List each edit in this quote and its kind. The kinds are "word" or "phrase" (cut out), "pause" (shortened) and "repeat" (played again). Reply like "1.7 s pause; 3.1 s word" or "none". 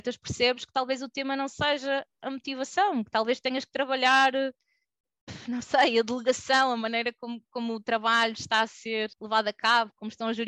9.1 s pause